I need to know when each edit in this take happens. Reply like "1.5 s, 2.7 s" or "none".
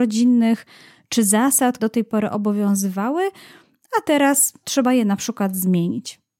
1.8 s, 4.6 s

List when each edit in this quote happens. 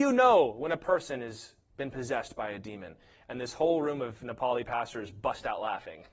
none

